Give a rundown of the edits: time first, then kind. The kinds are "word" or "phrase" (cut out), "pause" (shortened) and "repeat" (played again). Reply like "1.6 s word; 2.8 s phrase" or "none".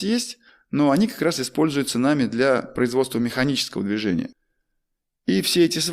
none